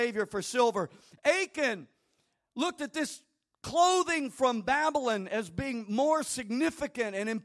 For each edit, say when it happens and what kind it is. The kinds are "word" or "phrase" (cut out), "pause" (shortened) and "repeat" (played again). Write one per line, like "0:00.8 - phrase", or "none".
none